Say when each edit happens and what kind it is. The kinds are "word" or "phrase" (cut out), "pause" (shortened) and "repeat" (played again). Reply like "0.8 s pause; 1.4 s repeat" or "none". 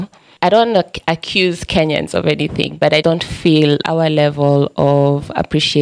3.0 s word; 3.8 s word